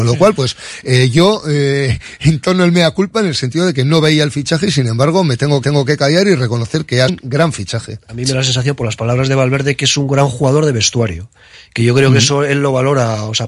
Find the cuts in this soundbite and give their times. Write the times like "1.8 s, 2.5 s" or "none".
5.6 s, 7.1 s